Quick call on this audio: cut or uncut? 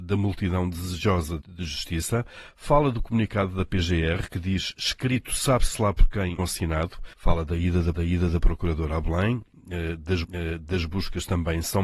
cut